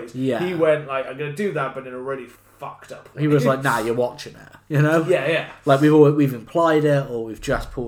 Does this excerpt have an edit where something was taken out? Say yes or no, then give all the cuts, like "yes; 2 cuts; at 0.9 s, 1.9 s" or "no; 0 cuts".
yes; 1 cut; at 2.3 s